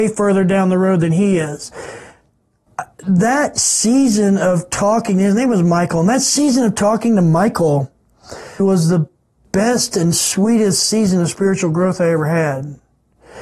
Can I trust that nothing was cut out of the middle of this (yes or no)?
no